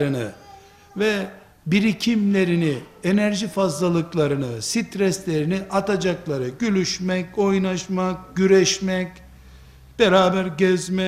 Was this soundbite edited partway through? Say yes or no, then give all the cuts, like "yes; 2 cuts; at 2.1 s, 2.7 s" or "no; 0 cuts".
no; 0 cuts